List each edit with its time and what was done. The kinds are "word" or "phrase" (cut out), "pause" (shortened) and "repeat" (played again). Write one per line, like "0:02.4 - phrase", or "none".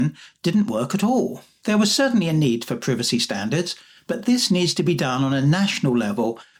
none